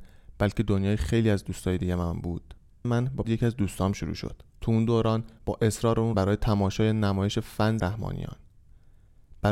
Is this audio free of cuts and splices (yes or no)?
no